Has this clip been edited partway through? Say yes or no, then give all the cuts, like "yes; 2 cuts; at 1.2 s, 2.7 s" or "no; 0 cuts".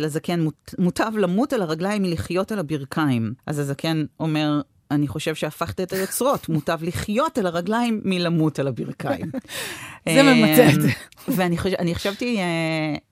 yes; 1 cut; at 3.4 s